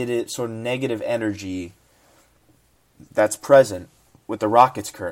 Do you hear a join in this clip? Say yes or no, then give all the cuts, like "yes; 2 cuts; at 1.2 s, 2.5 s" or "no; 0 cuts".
no; 0 cuts